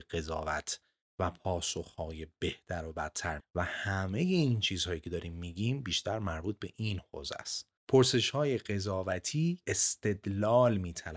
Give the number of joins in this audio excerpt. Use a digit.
3